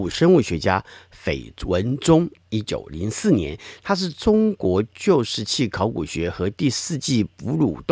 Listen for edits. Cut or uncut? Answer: uncut